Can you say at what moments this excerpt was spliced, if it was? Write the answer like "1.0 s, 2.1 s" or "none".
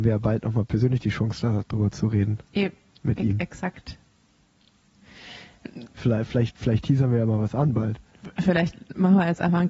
none